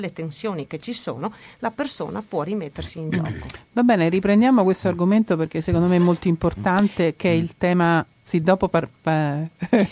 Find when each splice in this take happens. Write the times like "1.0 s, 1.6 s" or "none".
none